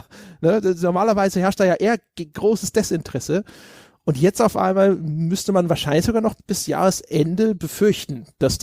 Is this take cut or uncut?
uncut